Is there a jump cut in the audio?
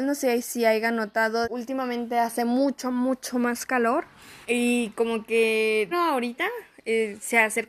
yes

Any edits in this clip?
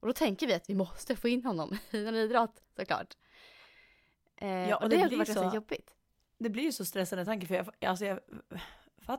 no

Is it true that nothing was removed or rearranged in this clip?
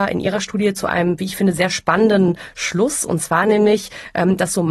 yes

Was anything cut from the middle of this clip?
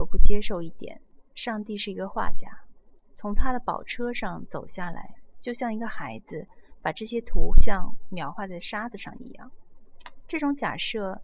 no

